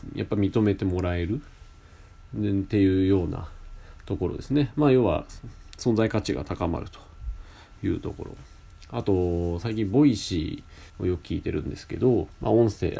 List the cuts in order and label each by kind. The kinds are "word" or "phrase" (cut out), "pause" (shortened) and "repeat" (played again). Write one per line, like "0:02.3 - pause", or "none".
0:10.9 - pause

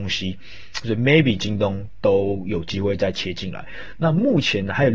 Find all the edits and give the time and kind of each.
none

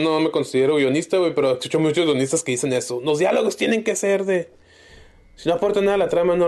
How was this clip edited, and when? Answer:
none

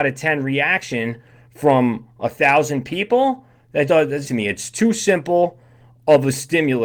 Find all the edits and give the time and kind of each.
0:03.9 - word
0:04.2 - phrase

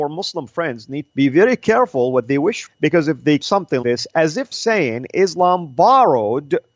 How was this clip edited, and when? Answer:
0:01.1 - word
0:02.7 - word
0:03.4 - word
0:03.8 - word
0:04.5 - word

